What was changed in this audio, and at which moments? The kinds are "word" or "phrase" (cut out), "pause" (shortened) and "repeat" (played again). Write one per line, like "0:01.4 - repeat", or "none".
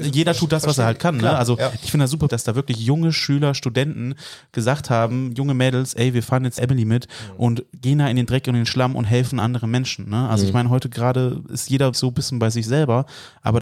0:02.3 - word
0:06.6 - word
0:11.9 - word